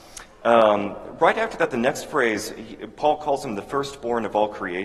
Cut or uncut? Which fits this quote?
uncut